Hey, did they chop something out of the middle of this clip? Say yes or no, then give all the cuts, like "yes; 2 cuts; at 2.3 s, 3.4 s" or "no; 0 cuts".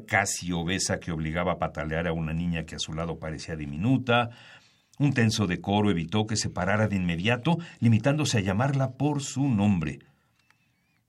no; 0 cuts